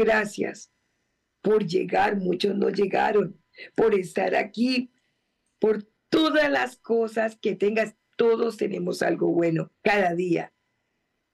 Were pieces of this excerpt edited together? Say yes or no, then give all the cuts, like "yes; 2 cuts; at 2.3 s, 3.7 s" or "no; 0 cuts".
yes; 2 cuts; at 6.0 s, 9.7 s